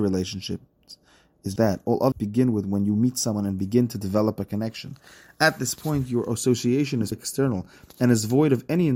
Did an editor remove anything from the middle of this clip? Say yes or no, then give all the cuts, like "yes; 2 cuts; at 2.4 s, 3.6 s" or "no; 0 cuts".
yes; 3 cuts; at 1.6 s, 2.1 s, 7.1 s